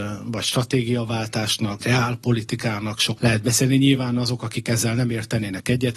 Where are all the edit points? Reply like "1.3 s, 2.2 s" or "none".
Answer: 1.8 s, 3.2 s